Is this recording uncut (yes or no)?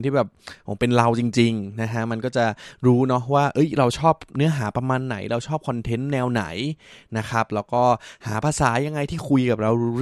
yes